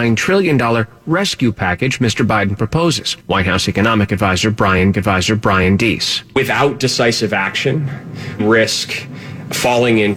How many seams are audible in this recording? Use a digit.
3